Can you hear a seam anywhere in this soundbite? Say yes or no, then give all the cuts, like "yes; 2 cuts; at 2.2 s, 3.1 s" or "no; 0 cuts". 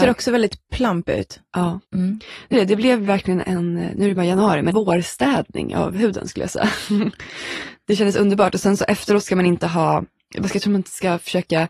yes; 4 cuts; at 1.8 s, 2.5 s, 3.4 s, 4.7 s